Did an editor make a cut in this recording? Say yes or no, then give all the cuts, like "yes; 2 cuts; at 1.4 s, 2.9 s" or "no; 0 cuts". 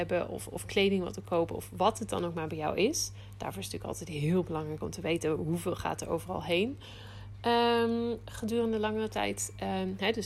no; 0 cuts